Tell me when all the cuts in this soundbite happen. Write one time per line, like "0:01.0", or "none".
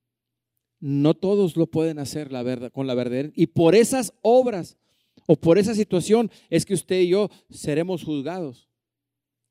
none

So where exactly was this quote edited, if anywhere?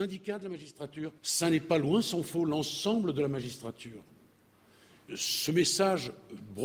0:01.2
0:05.1

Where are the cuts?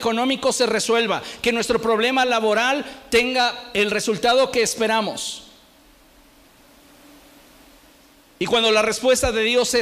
none

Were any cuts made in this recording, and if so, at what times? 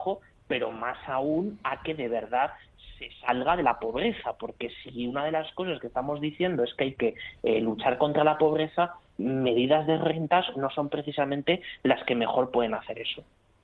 none

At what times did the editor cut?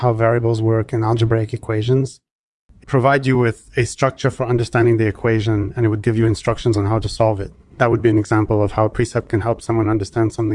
0:02.8

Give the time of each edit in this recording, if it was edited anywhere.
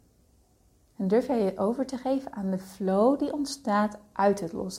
none

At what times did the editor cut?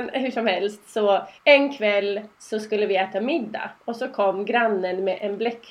0:01.4
0:03.8

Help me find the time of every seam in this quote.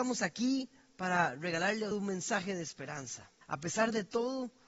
0:01.9
0:03.4

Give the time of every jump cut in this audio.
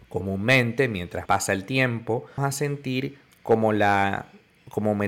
0:01.3
0:02.4
0:03.3

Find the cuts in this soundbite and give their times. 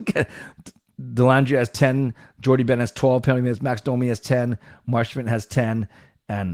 none

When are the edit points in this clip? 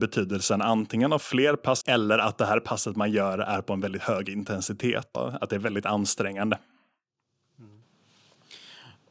0:01.8
0:05.1

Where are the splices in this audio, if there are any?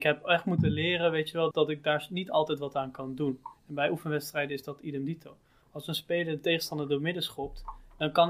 0:01.5
0:03.6

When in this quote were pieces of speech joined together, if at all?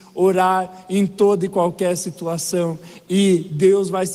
none

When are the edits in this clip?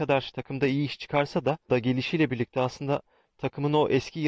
0:01.7

